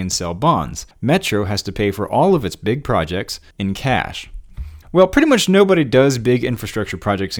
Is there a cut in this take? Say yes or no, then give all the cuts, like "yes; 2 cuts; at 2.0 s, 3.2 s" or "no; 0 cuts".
yes; 3 cuts; at 0.9 s, 3.5 s, 4.8 s